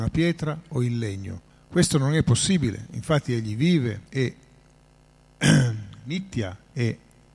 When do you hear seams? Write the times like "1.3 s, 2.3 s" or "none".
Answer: 1.5 s, 4.1 s